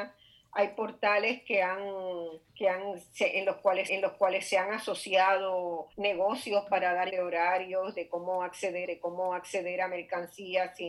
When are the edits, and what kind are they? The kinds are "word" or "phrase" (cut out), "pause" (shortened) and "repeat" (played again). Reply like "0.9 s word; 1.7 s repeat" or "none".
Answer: 2.5 s pause; 3.9 s repeat; 5.9 s pause; 7.1 s word; 8.8 s repeat